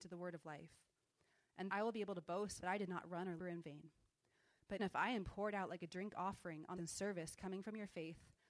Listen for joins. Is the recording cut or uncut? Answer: cut